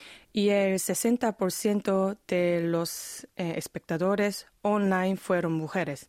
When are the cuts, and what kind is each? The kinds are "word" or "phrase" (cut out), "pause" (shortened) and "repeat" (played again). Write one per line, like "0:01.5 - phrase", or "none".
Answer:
none